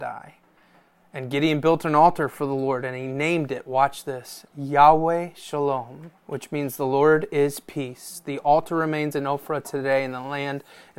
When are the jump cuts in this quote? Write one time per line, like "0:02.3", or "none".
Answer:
0:06.2